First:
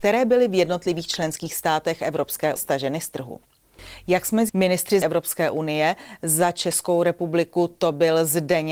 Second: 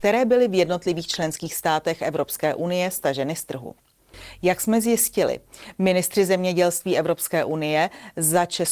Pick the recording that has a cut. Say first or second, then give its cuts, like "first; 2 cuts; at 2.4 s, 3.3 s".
first; 3 cuts; at 2.6 s, 4.5 s, 5.0 s